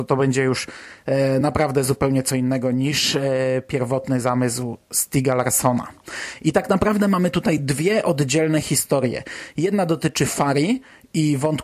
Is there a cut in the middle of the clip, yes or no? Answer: no